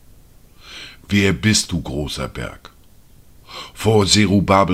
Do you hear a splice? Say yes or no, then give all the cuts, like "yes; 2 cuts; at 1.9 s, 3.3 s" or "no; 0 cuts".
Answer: no; 0 cuts